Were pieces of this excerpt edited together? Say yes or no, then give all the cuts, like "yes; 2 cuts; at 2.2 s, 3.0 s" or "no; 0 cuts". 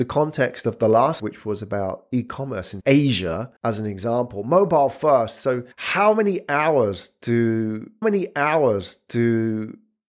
yes; 5 cuts; at 1.2 s, 2.8 s, 3.6 s, 5.7 s, 8.0 s